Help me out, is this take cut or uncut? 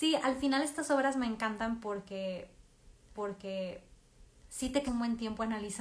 cut